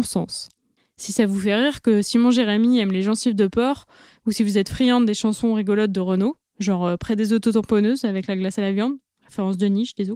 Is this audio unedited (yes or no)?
yes